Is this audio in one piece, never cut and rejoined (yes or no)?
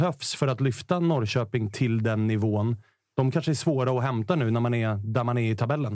yes